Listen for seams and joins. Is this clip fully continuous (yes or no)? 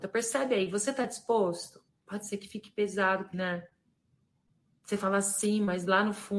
no